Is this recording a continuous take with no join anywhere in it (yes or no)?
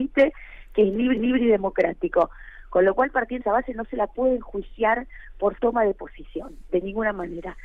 no